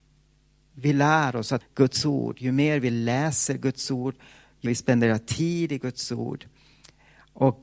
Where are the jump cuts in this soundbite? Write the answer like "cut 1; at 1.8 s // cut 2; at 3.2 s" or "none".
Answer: cut 1; at 1.6 s // cut 2; at 4.7 s